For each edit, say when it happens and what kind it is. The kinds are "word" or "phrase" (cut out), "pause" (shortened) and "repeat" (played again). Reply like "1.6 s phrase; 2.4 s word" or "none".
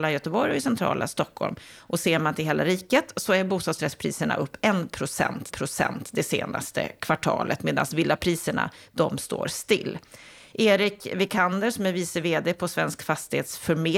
5.5 s repeat